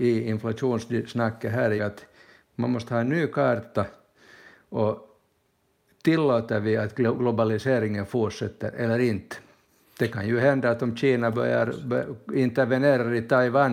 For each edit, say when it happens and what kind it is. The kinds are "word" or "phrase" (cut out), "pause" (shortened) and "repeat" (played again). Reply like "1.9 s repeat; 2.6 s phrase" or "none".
1.8 s phrase